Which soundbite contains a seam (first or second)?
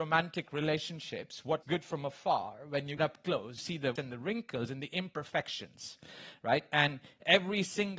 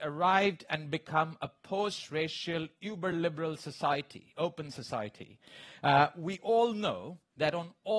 first